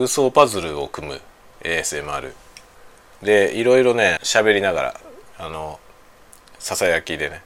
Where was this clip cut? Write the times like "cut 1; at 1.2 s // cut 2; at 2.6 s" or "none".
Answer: cut 1; at 1.5 s // cut 2; at 4.2 s // cut 3; at 5.3 s